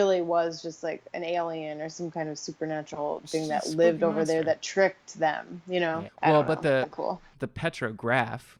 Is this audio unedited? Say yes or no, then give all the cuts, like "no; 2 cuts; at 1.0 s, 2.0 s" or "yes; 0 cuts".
no; 3 cuts; at 3.2 s, 6.1 s, 6.8 s